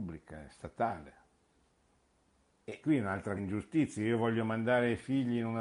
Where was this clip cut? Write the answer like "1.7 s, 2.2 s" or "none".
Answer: 2.8 s, 3.4 s